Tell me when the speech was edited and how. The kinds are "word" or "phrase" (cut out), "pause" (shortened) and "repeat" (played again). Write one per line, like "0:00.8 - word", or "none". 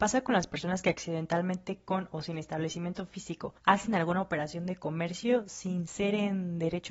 0:03.6 - pause

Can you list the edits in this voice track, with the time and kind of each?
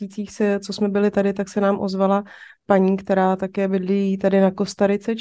none

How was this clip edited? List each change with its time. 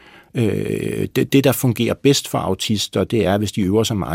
none

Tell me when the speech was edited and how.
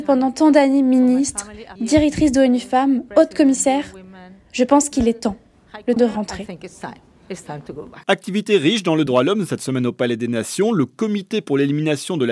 0:01.8 - word
0:06.0 - word
0:08.0 - pause
0:09.1 - phrase

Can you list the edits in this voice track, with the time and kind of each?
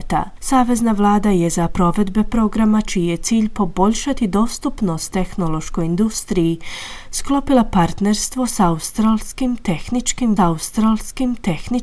0:01.7 - word
0:10.4 - repeat

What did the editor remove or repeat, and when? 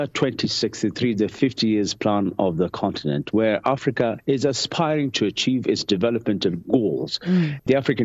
none

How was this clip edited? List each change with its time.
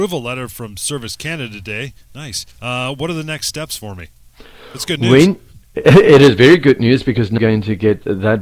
0:02.5 - pause
0:07.4 - word

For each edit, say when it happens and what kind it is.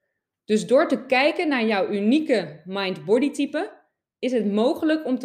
none

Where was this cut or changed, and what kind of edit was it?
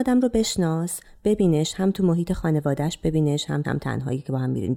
0:03.6 - phrase

